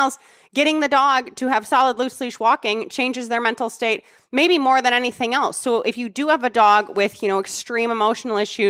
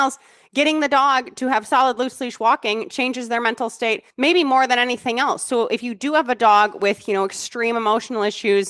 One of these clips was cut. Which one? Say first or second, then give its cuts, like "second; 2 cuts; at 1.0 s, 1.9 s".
second; 1 cut; at 4.1 s